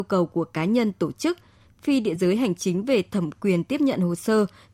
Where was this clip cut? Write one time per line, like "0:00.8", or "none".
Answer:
none